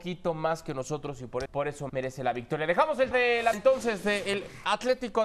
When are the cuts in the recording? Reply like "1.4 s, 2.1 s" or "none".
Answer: 1.5 s, 1.9 s, 3.1 s, 3.5 s